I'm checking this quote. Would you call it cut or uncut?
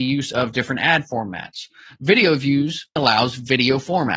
cut